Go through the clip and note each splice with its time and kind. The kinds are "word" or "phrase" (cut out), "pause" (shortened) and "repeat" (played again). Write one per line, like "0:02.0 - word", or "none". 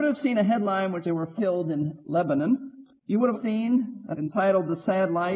0:01.0 - word
0:01.4 - word
0:03.0 - pause
0:03.3 - word
0:04.1 - word